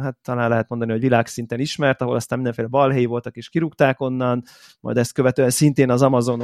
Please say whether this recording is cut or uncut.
uncut